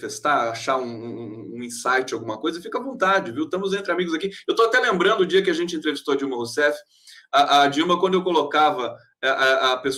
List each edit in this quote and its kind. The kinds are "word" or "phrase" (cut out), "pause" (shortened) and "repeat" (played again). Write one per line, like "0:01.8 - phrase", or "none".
none